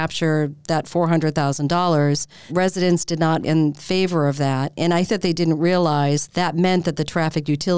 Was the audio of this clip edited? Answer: yes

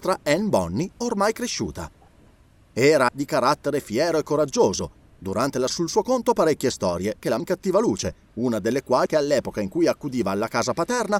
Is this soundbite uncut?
no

